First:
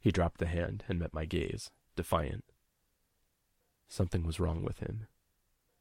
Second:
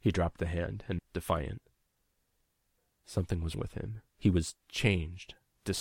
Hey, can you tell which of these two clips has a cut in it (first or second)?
second